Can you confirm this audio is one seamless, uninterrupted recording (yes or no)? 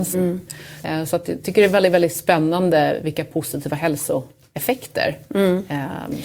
yes